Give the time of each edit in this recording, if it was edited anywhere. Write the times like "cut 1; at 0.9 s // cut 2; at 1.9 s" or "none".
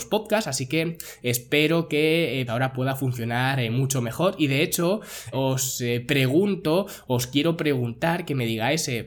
cut 1; at 2.5 s // cut 2; at 5.3 s